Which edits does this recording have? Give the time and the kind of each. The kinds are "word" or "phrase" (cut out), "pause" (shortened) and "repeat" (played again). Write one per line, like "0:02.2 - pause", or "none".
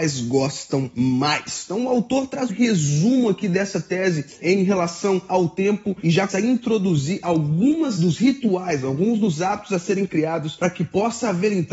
0:02.5 - word
0:06.3 - word
0:08.0 - word